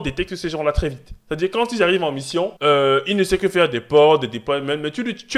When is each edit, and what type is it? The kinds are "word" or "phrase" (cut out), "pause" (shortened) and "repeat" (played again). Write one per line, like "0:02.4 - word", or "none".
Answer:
0:02.6 - pause